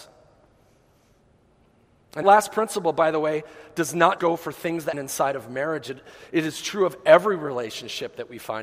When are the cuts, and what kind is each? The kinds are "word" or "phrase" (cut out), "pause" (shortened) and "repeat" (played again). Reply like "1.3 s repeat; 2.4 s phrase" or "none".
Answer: 2.2 s word; 4.2 s word; 4.9 s word